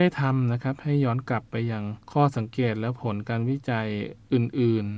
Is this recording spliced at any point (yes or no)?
yes